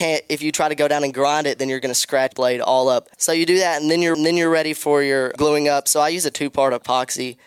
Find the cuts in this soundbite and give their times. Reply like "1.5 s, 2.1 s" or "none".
2.3 s, 3.1 s, 4.1 s, 5.4 s

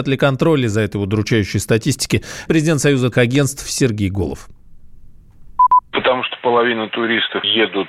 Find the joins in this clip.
2.5 s, 3.1 s

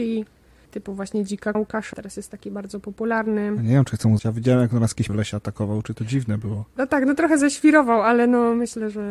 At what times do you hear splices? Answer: 1.5 s, 1.9 s, 4.2 s, 5.1 s, 5.9 s

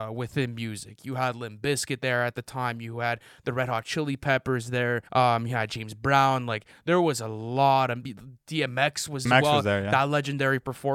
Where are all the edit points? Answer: 5.1 s, 9.3 s

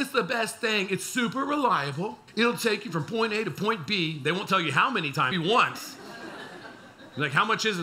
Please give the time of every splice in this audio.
2.3 s, 5.3 s

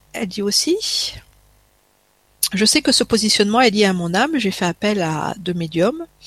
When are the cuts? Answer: none

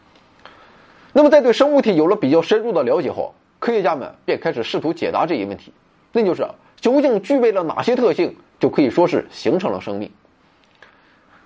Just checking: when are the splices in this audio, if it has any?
none

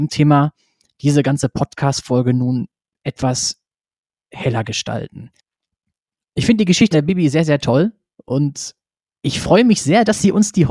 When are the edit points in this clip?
6.9 s

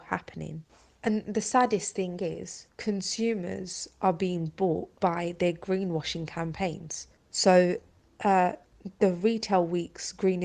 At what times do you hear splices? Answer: none

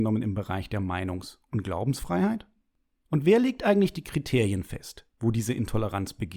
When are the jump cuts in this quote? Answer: none

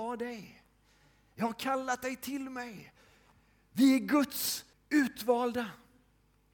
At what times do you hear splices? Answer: 4.7 s

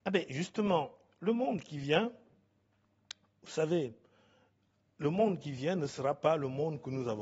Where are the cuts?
none

